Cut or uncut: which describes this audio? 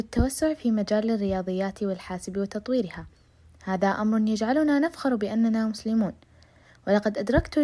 uncut